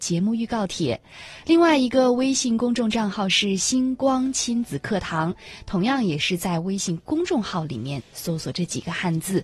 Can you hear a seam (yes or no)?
no